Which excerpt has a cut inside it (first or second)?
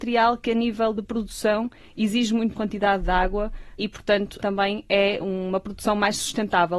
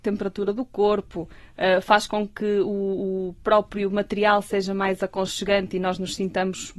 first